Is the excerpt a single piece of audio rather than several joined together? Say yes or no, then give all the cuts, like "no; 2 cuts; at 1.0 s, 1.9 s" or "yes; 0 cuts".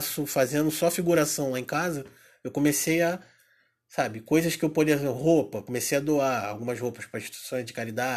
yes; 0 cuts